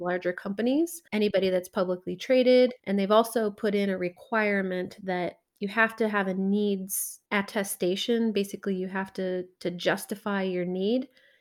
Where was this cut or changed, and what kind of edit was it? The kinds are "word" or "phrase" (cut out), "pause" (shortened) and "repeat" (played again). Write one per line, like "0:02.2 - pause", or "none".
0:01.1 - pause
0:02.8 - pause
0:07.3 - pause